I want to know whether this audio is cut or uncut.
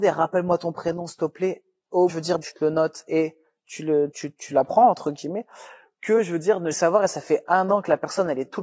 cut